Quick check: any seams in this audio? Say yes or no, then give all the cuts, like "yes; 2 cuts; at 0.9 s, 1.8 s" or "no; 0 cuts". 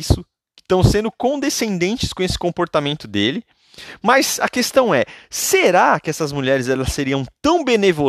no; 0 cuts